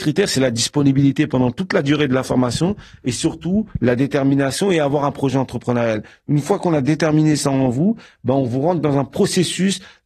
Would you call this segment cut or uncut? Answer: uncut